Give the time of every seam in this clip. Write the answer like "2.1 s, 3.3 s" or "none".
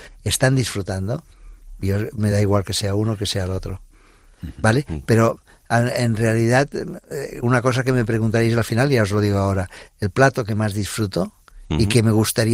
none